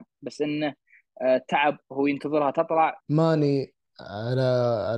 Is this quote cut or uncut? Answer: cut